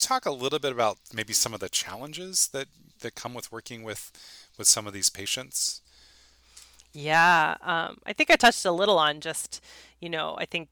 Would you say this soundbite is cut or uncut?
uncut